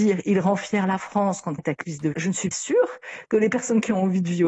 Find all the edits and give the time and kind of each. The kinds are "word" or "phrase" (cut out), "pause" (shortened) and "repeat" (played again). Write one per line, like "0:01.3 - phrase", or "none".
0:01.6 - word
0:02.1 - word
0:02.5 - word